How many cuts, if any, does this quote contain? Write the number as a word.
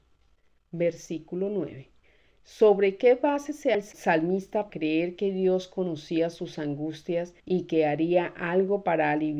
four